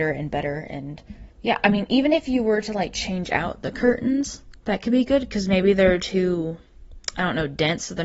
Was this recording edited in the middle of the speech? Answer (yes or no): yes